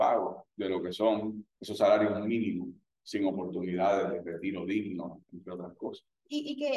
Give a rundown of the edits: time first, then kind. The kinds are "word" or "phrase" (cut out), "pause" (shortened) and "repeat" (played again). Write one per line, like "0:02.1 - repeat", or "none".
0:01.5 - pause

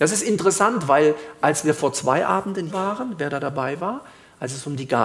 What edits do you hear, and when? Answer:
0:02.7 - word

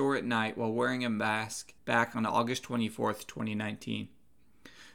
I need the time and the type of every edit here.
0:01.8 - pause

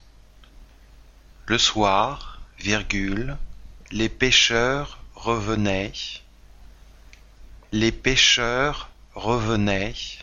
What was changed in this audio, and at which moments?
0:03.9 - pause

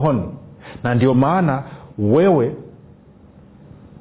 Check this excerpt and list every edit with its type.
none

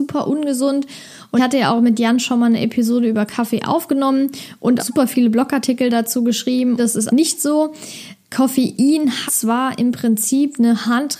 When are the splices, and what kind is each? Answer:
0:01.4 - word
0:04.8 - word
0:06.8 - word
0:07.1 - word
0:09.3 - word

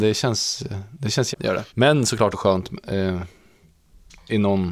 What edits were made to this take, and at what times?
0:01.3 - word
0:01.7 - pause
0:02.3 - word

